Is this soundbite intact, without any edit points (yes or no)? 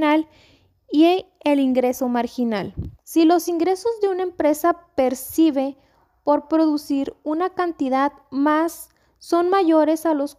no